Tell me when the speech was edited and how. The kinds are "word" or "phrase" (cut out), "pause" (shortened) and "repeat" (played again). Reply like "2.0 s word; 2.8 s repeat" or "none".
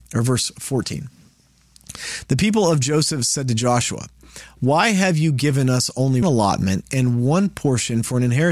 6.2 s word